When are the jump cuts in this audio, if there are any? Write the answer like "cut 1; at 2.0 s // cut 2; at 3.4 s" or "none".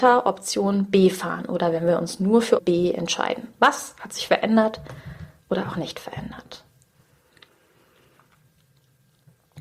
cut 1; at 2.6 s